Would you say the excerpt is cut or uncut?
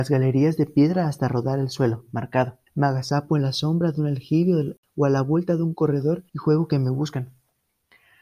cut